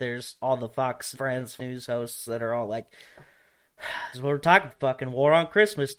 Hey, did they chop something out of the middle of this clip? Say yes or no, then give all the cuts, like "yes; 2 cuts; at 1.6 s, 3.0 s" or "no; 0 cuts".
yes; 4 cuts; at 1.1 s, 1.6 s, 4.1 s, 4.7 s